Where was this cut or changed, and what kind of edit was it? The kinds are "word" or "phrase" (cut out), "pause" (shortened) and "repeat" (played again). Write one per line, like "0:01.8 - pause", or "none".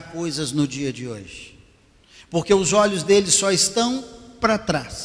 none